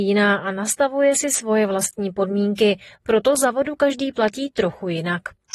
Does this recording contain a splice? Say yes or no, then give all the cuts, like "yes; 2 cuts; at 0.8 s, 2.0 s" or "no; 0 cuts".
no; 0 cuts